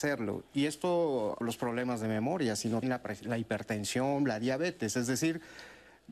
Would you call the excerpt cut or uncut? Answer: cut